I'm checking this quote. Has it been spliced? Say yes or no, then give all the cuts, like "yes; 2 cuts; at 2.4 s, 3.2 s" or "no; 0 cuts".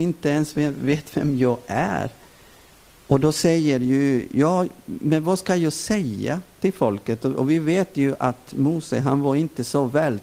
yes; 1 cut; at 2.7 s